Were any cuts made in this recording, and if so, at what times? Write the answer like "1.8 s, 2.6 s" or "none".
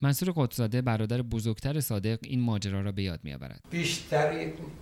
none